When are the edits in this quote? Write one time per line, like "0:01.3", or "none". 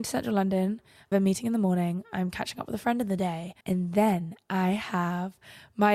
0:01.1
0:03.6